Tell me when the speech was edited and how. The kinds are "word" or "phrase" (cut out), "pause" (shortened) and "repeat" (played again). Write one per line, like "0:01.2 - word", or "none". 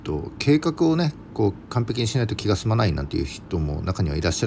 none